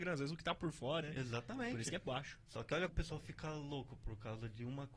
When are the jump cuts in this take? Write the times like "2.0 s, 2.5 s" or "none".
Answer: 1.0 s, 2.9 s